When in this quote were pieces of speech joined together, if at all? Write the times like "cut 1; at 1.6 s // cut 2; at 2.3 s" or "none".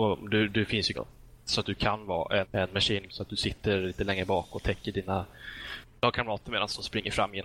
cut 1; at 0.9 s // cut 2; at 2.4 s // cut 3; at 3.1 s